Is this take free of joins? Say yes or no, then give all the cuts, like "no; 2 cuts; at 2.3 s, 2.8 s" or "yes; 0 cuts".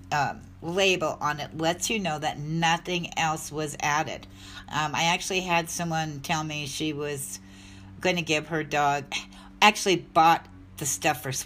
yes; 0 cuts